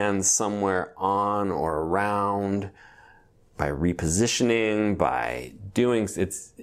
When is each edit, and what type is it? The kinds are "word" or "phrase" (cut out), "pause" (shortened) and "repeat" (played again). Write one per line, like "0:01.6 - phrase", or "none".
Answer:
none